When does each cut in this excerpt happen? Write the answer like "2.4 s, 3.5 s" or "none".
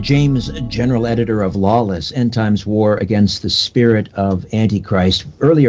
none